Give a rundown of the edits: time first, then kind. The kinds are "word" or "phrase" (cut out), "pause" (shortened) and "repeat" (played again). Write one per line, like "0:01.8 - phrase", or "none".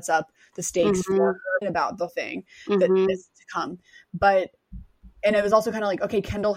0:01.6 - word
0:02.1 - word
0:05.1 - pause